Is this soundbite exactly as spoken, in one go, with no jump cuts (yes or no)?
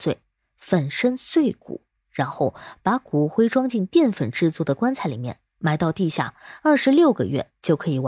yes